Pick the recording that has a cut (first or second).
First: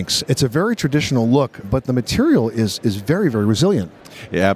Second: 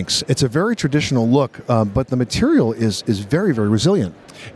first